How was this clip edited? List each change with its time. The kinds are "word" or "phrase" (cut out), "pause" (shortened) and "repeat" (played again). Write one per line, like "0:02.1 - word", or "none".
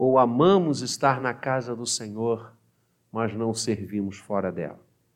none